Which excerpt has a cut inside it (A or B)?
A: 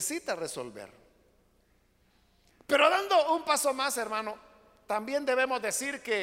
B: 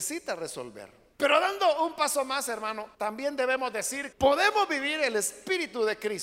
B